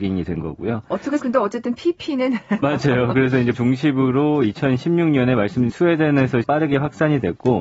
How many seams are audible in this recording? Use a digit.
5